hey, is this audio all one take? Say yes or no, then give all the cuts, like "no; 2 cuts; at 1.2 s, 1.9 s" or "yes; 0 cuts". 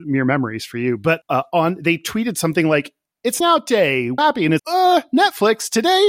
no; 4 cuts; at 1.2 s, 3.4 s, 4.2 s, 4.6 s